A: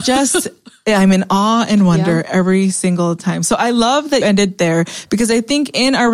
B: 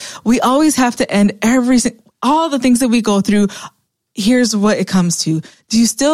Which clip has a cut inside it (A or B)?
A